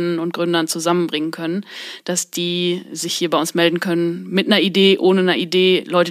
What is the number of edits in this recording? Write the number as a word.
zero